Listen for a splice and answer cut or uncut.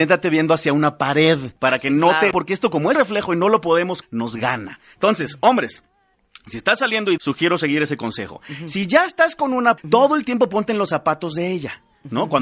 cut